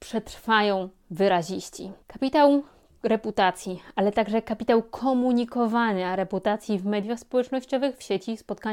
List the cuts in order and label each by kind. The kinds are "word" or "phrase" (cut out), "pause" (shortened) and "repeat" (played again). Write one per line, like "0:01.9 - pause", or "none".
0:02.0 - pause